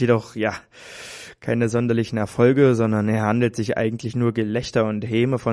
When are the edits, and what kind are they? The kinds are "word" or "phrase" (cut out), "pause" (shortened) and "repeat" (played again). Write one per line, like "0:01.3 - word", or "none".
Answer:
none